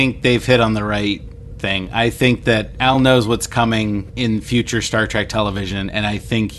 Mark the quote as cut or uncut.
uncut